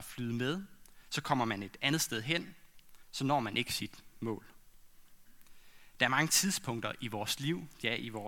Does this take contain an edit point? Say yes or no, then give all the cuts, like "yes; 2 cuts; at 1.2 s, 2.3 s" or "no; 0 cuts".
no; 0 cuts